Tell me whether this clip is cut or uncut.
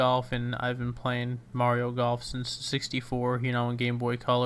cut